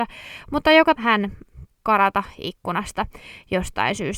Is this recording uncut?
no; 2 cuts; at 1.0 s, 1.7 s

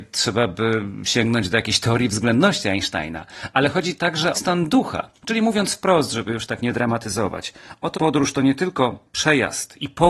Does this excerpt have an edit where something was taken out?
yes; 4 cuts; at 4.3 s, 5.2 s, 7.9 s, 9.1 s

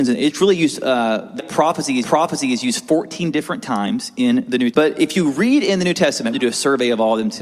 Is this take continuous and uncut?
no; 4 cuts; at 1.4 s, 2.0 s, 4.7 s, 6.3 s

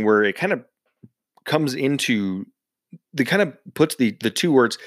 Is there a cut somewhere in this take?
yes; 1 cut; at 3.1 s

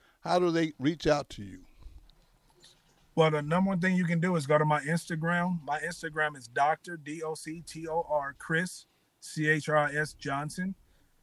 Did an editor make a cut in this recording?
no; 0 cuts

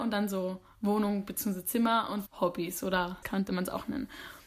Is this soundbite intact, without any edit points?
no; 2 cuts; at 2.3 s, 3.2 s

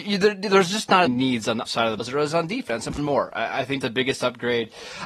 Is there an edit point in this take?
yes; 5 cuts; at 1.1 s, 1.7 s, 2.0 s, 3.0 s, 3.8 s

